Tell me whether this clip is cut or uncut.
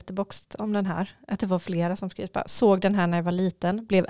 uncut